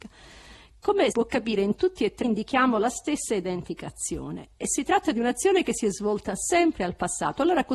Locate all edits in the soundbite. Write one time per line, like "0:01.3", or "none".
0:01.1
0:02.2

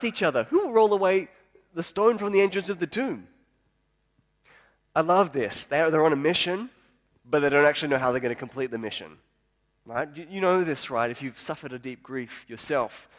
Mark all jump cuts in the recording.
none

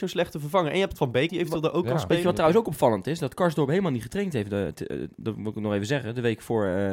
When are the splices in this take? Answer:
0:01.3

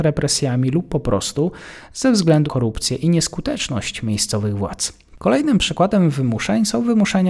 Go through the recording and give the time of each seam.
0:02.5

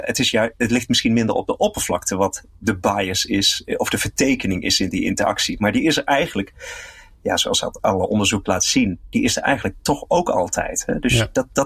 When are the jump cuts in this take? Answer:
none

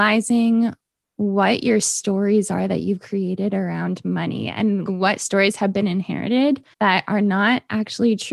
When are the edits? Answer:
0:04.9
0:06.7

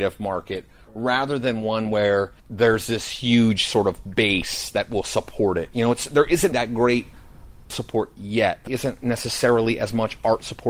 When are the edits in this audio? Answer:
0:06.5
0:07.7
0:08.7

